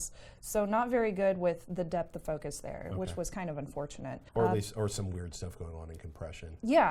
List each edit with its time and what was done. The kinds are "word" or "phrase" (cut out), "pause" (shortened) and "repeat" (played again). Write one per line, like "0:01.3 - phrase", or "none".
0:04.3 - pause